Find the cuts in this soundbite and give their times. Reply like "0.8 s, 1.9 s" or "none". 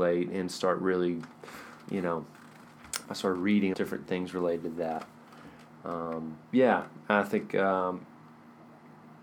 3.0 s, 3.7 s, 6.4 s